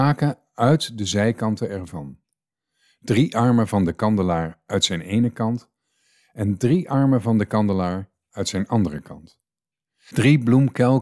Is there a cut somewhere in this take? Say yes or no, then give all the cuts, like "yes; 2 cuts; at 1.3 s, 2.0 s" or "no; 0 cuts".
no; 0 cuts